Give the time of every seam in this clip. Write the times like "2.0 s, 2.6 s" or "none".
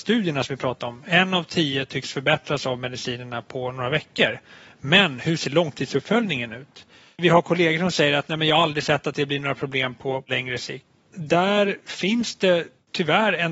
none